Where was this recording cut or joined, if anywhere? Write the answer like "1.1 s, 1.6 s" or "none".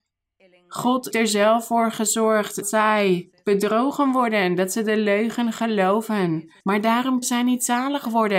1.1 s, 2.6 s, 6.6 s, 7.2 s